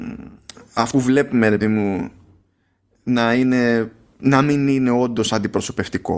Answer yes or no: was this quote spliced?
yes